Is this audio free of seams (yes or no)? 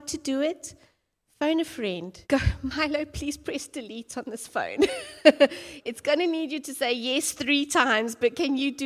no